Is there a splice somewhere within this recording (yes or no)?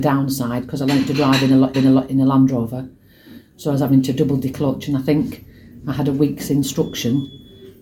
yes